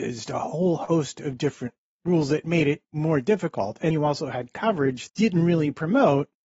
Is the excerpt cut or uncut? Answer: cut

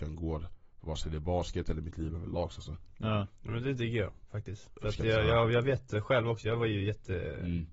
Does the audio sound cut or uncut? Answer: uncut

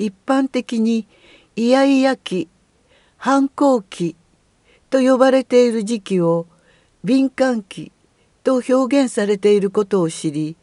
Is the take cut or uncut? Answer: uncut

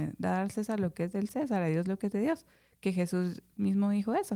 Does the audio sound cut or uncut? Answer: uncut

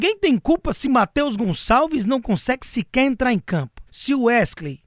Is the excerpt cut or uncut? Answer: cut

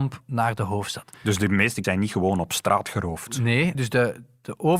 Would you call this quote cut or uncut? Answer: cut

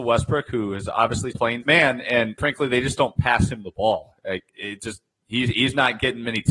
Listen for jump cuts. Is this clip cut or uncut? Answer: cut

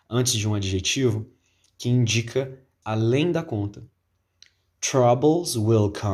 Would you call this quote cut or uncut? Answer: cut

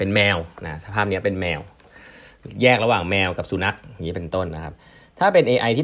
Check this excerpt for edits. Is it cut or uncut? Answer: uncut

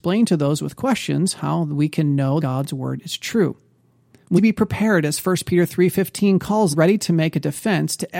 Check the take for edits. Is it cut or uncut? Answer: cut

